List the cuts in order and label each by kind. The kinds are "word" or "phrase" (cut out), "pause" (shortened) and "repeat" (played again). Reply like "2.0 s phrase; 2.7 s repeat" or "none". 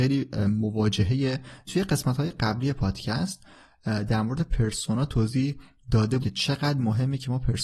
1.7 s word; 6.2 s word